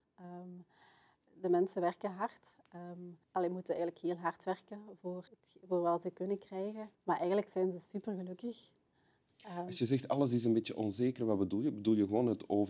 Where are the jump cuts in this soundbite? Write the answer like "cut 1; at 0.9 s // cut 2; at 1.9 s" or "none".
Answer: cut 1; at 3.2 s // cut 2; at 5.3 s // cut 3; at 6.9 s